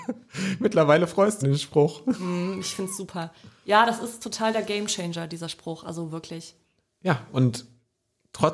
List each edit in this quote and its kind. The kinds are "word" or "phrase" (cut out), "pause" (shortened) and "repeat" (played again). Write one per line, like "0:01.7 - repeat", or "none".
0:01.4 - phrase